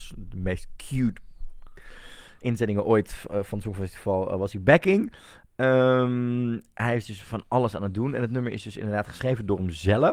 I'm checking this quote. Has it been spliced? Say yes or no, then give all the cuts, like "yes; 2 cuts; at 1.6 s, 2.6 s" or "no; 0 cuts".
no; 0 cuts